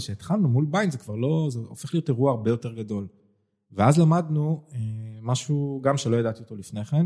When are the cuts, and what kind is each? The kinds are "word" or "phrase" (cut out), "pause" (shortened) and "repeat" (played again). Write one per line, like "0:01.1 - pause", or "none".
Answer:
none